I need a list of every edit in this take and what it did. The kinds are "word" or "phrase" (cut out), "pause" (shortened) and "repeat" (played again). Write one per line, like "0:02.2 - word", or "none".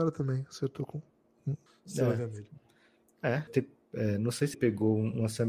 0:01.7 - pause
0:03.5 - word
0:04.5 - word